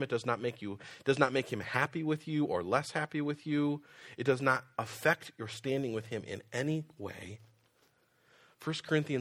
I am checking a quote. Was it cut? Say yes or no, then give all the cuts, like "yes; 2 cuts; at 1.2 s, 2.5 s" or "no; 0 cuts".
no; 0 cuts